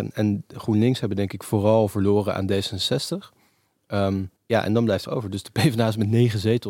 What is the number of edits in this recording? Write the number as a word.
two